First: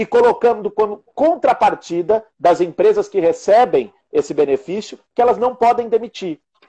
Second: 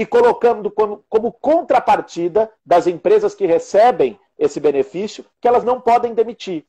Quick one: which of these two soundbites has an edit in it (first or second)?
first